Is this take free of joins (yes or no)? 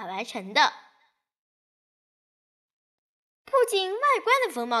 yes